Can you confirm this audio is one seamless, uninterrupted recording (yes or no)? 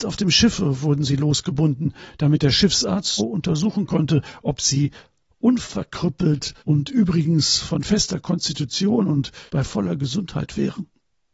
no